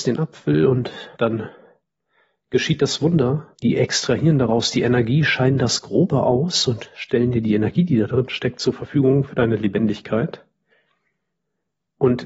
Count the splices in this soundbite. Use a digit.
2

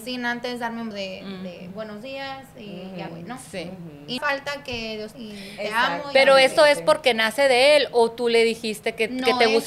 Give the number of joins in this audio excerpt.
4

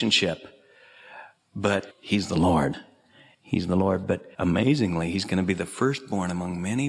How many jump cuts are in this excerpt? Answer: 2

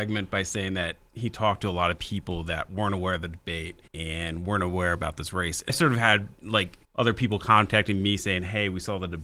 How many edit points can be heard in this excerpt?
3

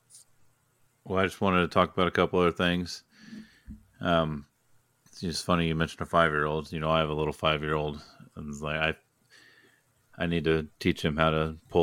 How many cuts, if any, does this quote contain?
0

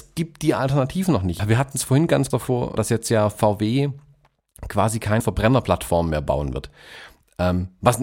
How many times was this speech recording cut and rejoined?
4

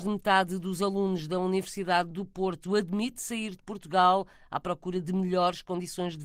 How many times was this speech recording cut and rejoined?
0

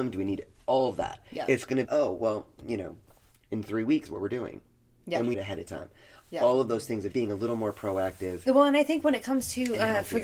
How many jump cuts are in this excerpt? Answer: 4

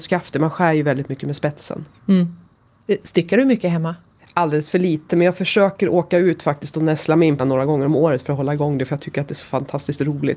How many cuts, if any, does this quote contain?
1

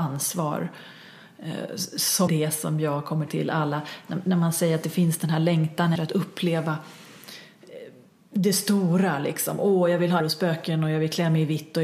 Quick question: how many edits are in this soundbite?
4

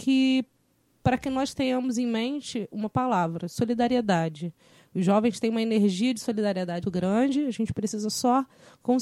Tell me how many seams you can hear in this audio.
1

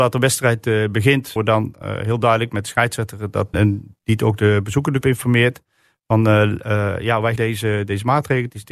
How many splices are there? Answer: 4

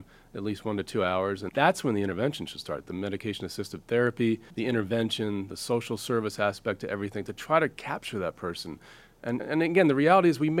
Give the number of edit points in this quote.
3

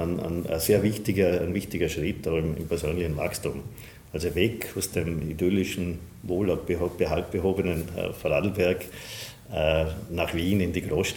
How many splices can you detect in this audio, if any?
0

